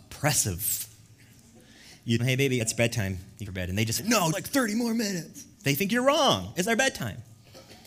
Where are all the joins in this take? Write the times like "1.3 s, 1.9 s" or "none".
2.2 s, 2.6 s, 3.5 s, 4.0 s, 4.3 s, 5.5 s, 6.7 s